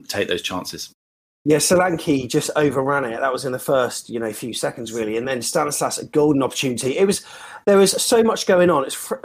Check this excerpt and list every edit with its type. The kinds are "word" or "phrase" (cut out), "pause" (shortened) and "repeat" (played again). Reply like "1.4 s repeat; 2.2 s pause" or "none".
none